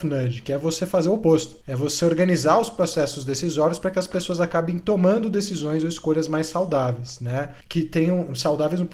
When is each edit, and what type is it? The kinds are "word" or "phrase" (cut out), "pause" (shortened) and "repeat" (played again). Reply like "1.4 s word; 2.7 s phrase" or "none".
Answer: 1.6 s pause; 7.6 s pause